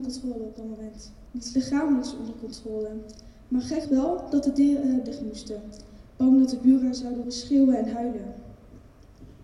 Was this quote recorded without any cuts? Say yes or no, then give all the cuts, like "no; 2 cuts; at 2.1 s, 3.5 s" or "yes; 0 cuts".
no; 4 cuts; at 1.3 s, 3.8 s, 5.0 s, 7.2 s